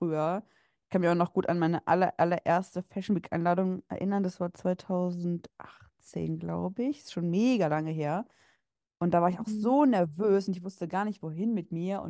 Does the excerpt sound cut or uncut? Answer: uncut